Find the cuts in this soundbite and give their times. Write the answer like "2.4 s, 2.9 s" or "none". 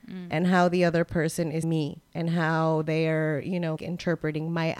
1.6 s, 2.1 s, 3.8 s